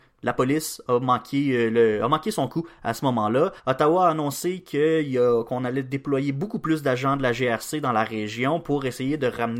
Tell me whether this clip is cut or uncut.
cut